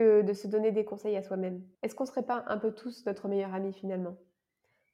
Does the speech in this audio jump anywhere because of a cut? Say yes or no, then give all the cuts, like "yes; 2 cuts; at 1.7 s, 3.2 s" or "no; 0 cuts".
yes; 1 cut; at 1.7 s